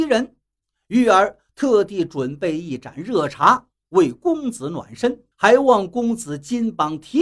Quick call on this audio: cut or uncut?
cut